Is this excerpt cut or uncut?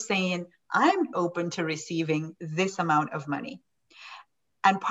cut